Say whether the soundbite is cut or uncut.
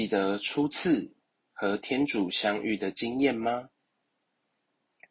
uncut